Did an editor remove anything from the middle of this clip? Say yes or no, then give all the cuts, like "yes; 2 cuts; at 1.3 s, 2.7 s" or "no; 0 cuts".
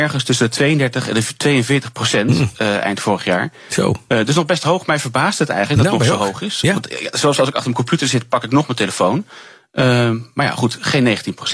no; 0 cuts